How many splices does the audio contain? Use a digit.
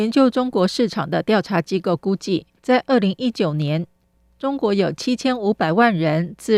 1